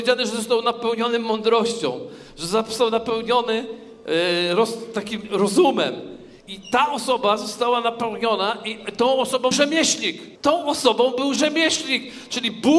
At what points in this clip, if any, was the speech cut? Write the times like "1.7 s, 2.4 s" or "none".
6.5 s, 9.5 s, 10.4 s